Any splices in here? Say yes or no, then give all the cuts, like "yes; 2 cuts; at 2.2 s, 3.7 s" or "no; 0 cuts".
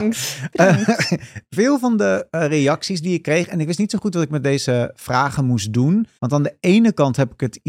yes; 1 cut; at 6.2 s